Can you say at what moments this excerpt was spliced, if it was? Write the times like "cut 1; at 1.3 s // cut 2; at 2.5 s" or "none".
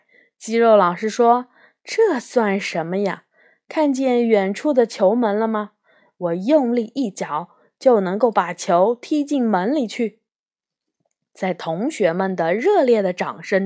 none